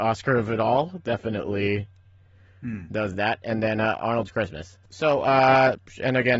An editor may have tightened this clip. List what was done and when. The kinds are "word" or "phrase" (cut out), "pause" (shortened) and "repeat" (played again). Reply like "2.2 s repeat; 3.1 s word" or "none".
none